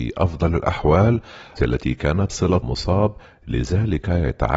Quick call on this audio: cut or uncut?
cut